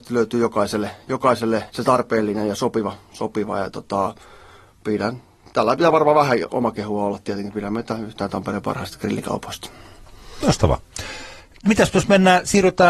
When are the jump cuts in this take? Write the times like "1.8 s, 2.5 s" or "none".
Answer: 1.7 s, 6.5 s